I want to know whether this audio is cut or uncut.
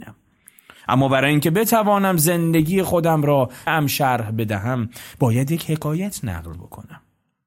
cut